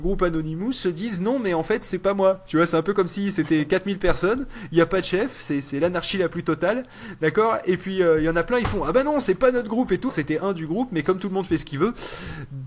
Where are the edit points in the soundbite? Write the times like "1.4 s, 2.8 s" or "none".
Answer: 10.1 s